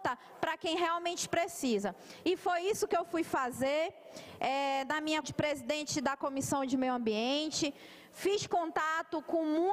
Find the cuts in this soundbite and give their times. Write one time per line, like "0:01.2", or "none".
0:05.2

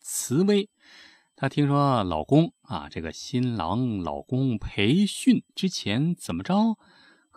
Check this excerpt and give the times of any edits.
0:05.5

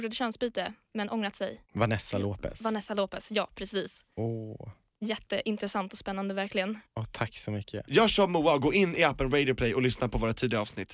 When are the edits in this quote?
0:01.6
0:04.1
0:06.9

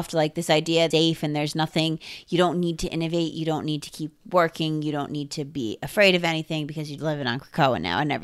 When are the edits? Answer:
0:00.9
0:07.0

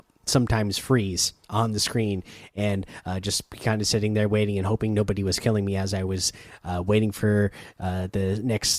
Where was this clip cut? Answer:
0:01.4

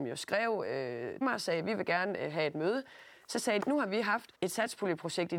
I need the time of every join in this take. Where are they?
0:01.2
0:03.6
0:04.3

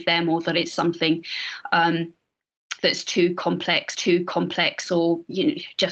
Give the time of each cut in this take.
0:02.8
0:03.9

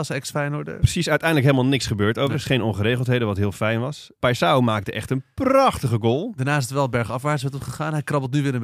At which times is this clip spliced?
none

